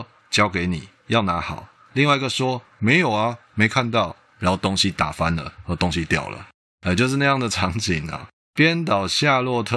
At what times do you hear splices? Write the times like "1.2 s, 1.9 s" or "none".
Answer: 8.4 s